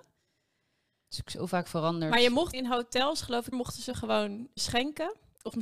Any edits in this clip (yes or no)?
yes